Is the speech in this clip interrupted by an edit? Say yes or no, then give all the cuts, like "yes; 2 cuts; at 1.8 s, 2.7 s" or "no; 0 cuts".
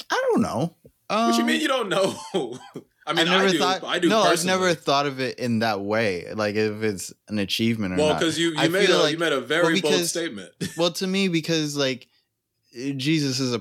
no; 0 cuts